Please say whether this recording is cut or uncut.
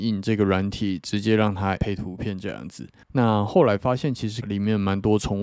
cut